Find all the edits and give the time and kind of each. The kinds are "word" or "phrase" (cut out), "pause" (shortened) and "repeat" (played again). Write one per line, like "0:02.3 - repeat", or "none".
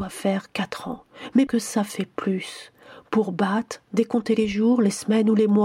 0:01.5 - word